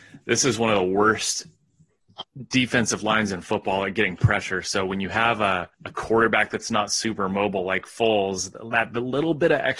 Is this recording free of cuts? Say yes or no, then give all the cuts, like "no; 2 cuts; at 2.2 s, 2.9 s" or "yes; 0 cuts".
no; 1 cut; at 5.7 s